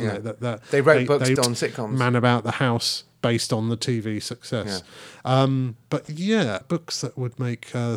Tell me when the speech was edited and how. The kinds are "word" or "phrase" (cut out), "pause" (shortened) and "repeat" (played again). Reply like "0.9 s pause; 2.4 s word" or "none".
1.4 s word; 6.6 s word